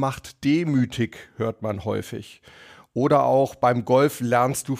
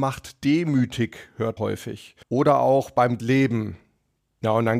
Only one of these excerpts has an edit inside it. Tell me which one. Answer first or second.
second